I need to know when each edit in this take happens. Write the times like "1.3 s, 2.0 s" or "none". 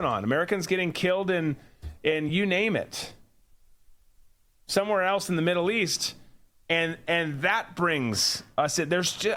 none